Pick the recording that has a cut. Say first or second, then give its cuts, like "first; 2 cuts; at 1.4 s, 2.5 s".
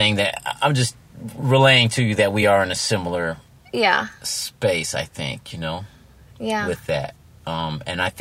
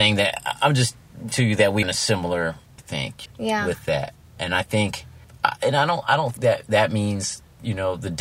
second; 7 cuts; at 1.3 s, 1.8 s, 2.8 s, 3.3 s, 4.4 s, 5.2 s, 6.4 s